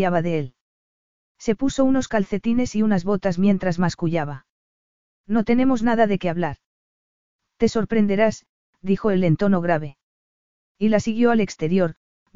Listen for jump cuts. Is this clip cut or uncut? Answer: uncut